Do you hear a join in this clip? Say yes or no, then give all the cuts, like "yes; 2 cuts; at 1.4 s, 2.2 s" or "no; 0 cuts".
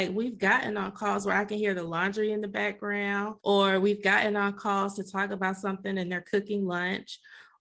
yes; 1 cut; at 3.4 s